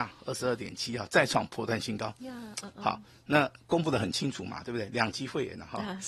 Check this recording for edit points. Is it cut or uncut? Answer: uncut